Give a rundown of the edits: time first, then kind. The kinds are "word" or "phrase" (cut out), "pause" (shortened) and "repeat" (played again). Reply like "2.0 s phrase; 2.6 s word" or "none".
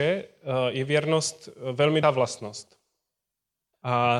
2.0 s word